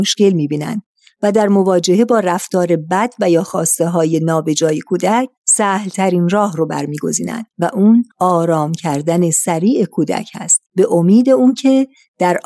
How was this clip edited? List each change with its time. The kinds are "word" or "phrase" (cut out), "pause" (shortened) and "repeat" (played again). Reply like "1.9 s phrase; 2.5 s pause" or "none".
5.4 s pause; 7.5 s pause; 8.1 s pause; 10.7 s pause

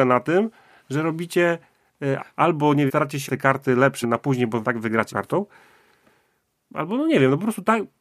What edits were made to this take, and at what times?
2.2 s word; 2.9 s word; 3.3 s word; 4.0 s word; 4.6 s phrase; 5.1 s word

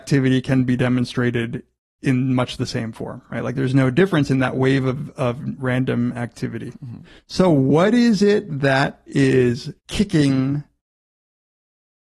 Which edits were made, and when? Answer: 9.8 s pause

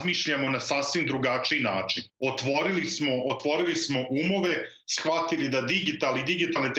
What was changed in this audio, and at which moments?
2.1 s pause

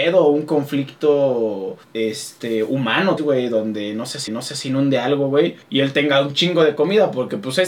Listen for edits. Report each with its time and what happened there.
1.8 s pause; 3.2 s phrase; 4.3 s repeat; 5.6 s pause

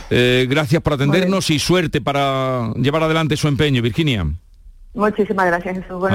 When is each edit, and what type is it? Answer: none

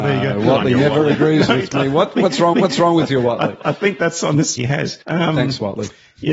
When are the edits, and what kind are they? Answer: 2.5 s repeat; 4.6 s phrase; 5.0 s pause

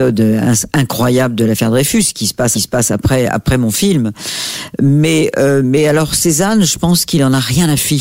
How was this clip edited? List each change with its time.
2.5 s repeat

